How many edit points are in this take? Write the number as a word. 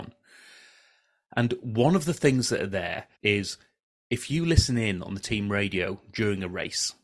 one